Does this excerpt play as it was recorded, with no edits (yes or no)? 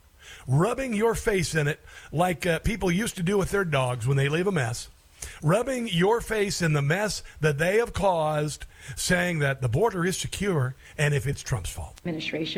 no